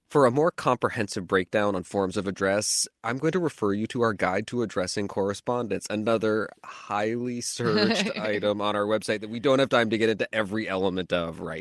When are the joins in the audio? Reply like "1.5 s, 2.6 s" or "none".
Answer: 3.0 s